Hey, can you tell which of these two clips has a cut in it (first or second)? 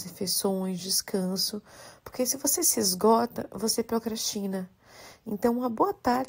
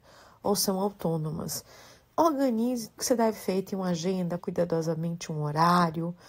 second